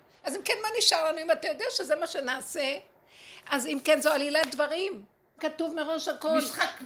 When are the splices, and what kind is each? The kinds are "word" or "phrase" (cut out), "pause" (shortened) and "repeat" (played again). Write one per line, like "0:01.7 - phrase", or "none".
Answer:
0:05.4 - word